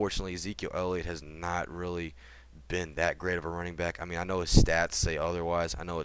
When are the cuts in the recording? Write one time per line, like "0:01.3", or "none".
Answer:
none